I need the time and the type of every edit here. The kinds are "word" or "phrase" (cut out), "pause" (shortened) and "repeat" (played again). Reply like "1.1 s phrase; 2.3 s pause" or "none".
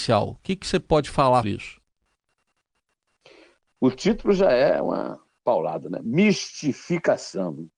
1.4 s word